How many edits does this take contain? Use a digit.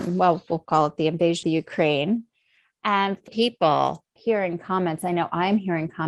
3